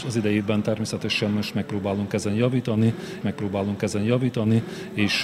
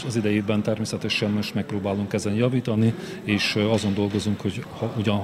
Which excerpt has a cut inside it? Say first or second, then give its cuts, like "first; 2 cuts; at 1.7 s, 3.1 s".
first; 1 cut; at 3.2 s